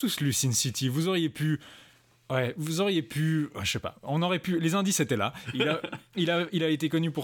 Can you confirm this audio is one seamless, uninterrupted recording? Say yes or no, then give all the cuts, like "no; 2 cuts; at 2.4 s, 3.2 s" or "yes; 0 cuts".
yes; 0 cuts